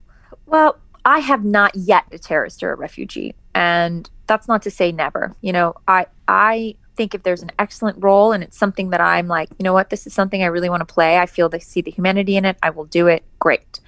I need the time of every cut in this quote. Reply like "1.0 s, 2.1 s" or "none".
0.9 s, 2.1 s, 6.9 s